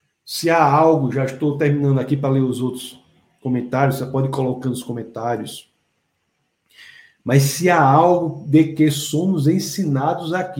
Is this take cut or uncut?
uncut